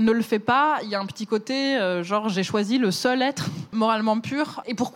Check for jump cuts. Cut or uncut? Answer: uncut